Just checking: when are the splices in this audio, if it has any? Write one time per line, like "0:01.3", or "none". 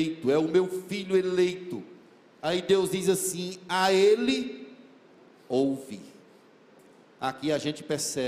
none